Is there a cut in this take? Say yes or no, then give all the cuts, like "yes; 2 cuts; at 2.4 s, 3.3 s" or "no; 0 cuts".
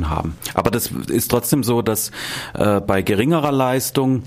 no; 0 cuts